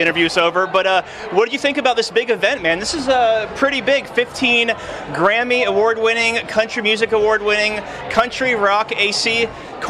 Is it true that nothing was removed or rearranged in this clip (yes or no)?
yes